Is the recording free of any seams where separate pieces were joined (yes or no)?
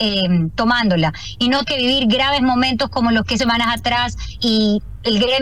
no